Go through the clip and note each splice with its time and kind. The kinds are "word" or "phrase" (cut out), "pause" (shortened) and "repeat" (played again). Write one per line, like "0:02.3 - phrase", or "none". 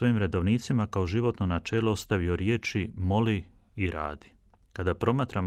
none